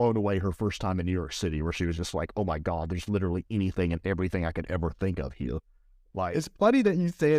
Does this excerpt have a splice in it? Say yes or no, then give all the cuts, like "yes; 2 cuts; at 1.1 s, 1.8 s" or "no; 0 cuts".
no; 0 cuts